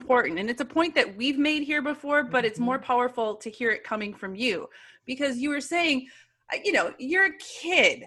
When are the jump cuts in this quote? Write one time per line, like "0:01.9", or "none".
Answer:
none